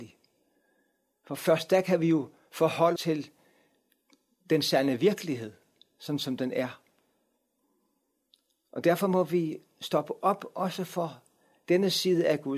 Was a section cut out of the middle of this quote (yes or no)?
yes